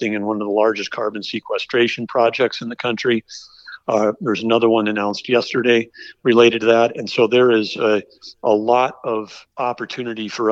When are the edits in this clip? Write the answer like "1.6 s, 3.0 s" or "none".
9.5 s

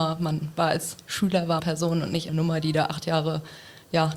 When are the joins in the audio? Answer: 1.6 s, 2.3 s

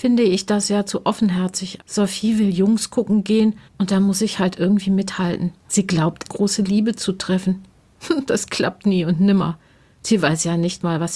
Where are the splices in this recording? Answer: 1.8 s, 3.7 s, 5.6 s, 6.3 s

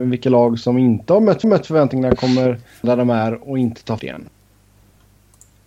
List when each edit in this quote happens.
1.4 s, 2.8 s, 4.0 s

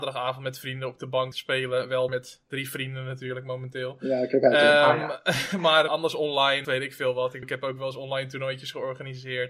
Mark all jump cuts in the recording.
1.3 s, 2.1 s, 5.9 s, 6.6 s, 7.4 s

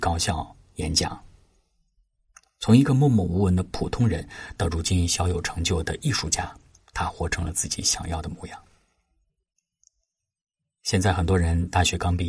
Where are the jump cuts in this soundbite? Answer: none

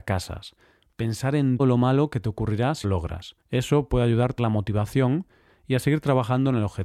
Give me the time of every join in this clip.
1.6 s, 2.8 s, 3.4 s, 4.4 s

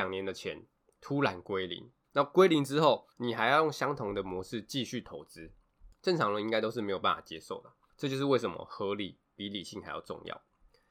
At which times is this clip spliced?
2.0 s, 3.1 s

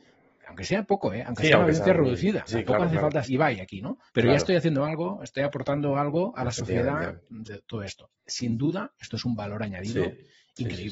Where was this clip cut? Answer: 2.5 s, 3.3 s, 4.1 s, 7.4 s, 8.1 s

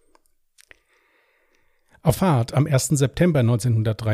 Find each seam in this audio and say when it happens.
2.1 s

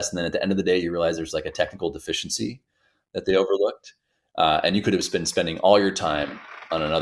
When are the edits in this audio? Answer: none

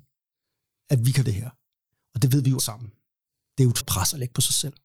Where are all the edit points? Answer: 1.3 s, 2.6 s, 3.8 s

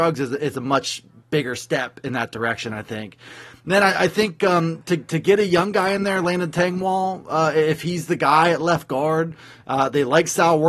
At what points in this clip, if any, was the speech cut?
none

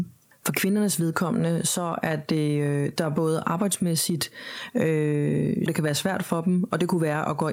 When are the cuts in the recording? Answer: 5.7 s

